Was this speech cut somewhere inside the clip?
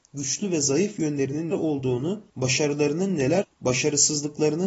yes; 3 cuts; at 1.5 s, 2.3 s, 3.4 s

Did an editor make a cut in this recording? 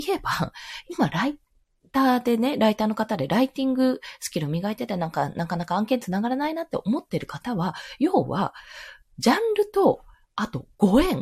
no; 0 cuts

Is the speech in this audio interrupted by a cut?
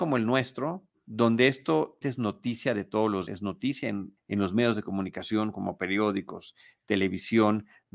yes; 3 cuts; at 2.0 s, 3.3 s, 4.2 s

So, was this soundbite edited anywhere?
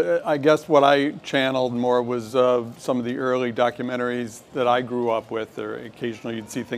no; 0 cuts

